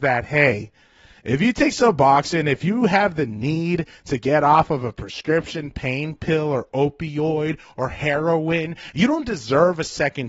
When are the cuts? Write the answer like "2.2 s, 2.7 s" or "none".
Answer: none